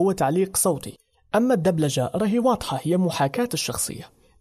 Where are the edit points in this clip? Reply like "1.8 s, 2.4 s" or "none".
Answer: none